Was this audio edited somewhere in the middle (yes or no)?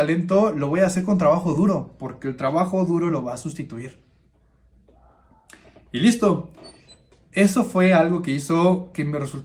no